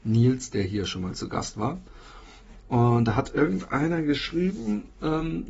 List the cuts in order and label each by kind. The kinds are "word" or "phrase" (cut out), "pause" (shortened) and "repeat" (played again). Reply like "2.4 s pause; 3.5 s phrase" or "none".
none